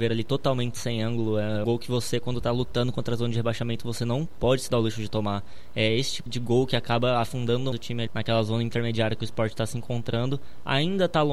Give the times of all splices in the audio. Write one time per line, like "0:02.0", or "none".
0:01.6
0:06.3
0:07.7
0:08.1